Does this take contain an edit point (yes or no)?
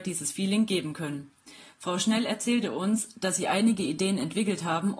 no